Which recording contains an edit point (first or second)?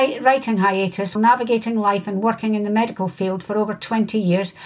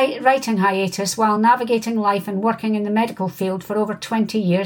first